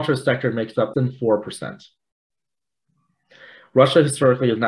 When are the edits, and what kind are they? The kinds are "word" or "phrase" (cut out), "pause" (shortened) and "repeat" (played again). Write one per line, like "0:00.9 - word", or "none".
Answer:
0:00.9 - word